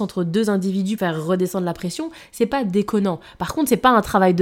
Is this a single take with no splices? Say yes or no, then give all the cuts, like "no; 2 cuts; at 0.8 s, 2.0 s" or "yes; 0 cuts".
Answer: no; 1 cut; at 1.0 s